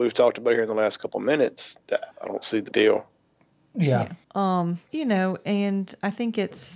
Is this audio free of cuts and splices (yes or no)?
no